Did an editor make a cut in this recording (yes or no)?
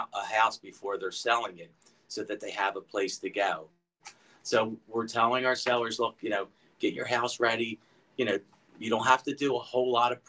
no